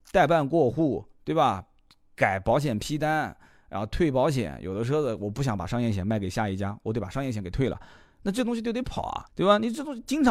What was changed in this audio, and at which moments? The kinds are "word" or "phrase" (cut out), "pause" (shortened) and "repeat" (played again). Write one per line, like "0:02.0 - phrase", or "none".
0:09.3 - pause